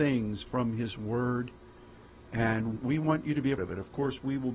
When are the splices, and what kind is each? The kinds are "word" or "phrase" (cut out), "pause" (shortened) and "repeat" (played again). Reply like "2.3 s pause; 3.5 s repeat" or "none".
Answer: 2.8 s word; 3.6 s word